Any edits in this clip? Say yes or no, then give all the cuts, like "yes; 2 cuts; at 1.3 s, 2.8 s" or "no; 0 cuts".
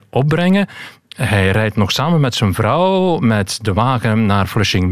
no; 0 cuts